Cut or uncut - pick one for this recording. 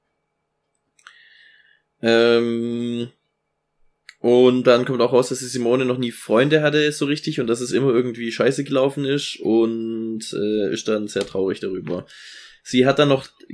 uncut